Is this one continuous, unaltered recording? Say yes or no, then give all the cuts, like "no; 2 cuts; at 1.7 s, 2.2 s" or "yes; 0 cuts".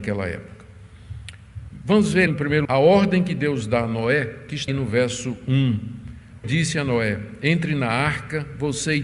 no; 4 cuts; at 2.3 s, 2.6 s, 4.7 s, 6.4 s